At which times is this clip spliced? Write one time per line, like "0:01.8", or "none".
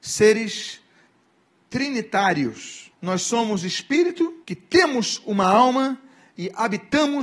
0:02.9
0:04.4